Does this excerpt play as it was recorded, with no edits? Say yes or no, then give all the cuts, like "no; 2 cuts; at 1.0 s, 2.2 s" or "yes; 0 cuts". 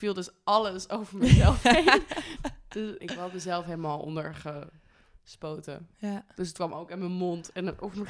no; 2 cuts; at 3.0 s, 5.9 s